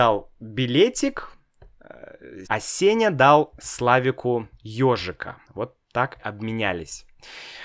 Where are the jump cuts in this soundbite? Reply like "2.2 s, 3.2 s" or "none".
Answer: 2.4 s, 5.4 s, 6.2 s